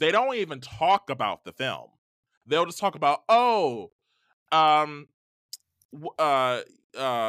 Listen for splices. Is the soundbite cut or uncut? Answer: uncut